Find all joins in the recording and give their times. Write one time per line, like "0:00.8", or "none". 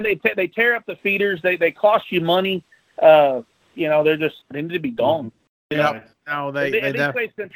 0:04.4